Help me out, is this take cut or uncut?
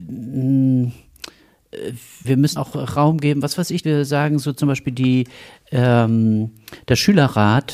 cut